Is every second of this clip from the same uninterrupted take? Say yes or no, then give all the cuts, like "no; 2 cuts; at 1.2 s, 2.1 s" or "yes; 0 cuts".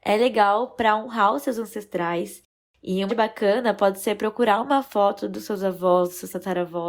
no; 1 cut; at 3.1 s